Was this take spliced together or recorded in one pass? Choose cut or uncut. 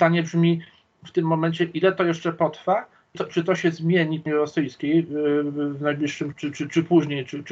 cut